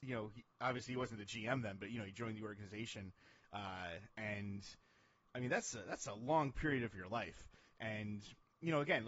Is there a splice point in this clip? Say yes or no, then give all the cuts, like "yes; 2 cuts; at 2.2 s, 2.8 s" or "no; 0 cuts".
no; 0 cuts